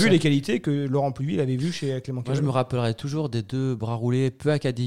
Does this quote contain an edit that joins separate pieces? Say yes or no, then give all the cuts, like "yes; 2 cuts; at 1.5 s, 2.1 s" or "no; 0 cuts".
no; 0 cuts